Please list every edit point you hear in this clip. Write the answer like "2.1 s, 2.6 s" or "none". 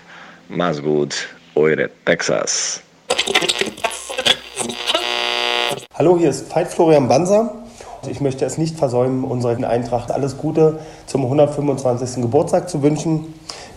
8.0 s, 8.6 s, 9.6 s, 10.1 s